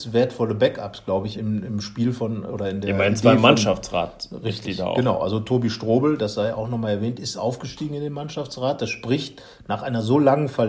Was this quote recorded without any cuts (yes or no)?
no